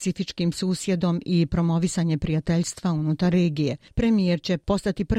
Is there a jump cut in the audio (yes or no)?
no